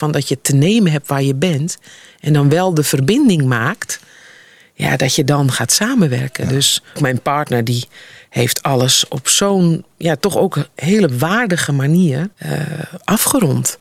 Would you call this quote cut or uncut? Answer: cut